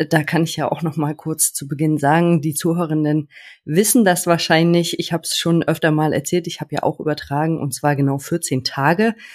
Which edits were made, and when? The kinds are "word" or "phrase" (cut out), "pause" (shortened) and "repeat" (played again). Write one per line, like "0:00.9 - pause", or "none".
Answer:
none

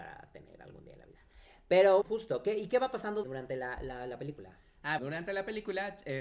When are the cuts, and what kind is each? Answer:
0:02.0 - word
0:03.2 - word
0:05.0 - word

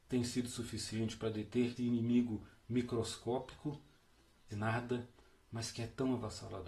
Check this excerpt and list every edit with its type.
0:01.8 - word
0:04.5 - phrase

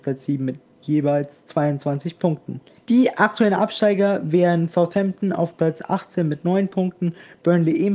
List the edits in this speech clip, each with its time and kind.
0:02.8 - pause

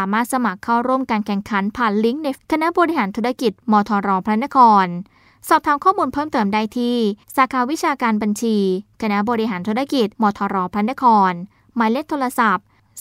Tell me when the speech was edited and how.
0:02.4 - word
0:07.2 - pause
0:10.1 - pause

